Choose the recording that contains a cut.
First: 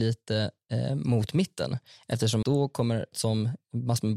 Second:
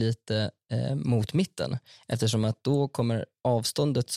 first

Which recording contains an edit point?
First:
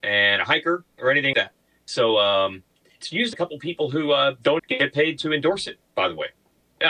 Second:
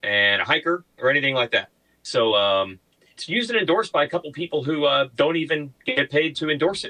first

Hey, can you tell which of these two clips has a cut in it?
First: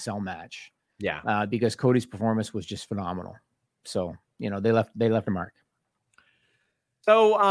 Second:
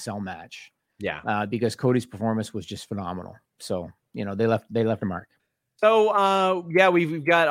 second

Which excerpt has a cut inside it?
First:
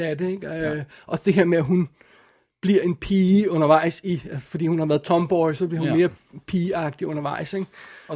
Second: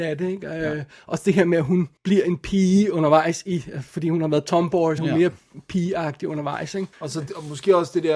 second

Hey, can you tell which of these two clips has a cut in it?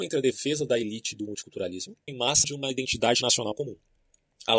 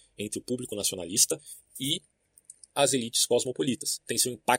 first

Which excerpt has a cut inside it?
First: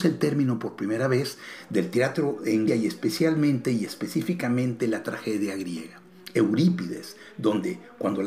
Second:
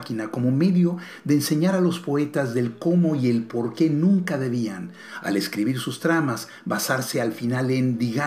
first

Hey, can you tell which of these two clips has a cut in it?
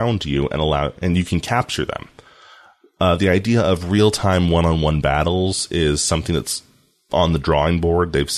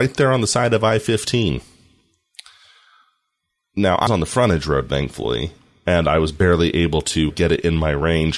second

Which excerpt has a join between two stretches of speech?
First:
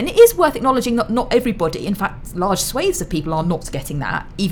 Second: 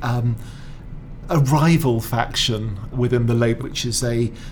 second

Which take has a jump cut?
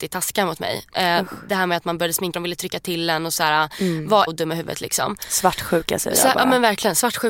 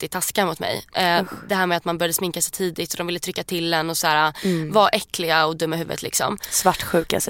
first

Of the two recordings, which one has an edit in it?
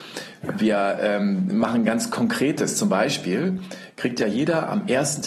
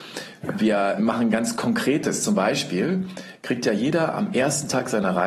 second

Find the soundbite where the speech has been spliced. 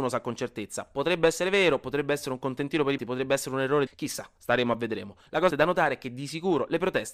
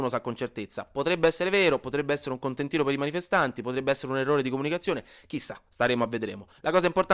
first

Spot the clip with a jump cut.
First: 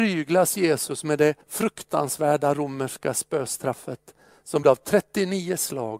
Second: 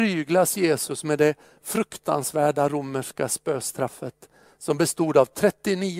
first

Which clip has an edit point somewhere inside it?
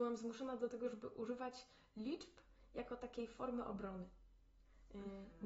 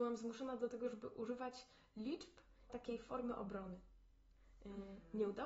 second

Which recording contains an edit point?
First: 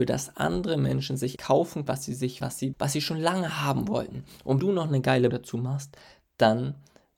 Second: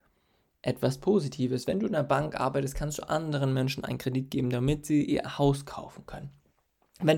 first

